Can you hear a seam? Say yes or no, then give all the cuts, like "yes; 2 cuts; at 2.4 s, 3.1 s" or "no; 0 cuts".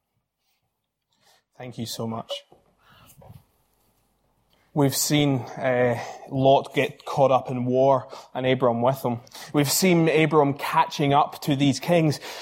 no; 0 cuts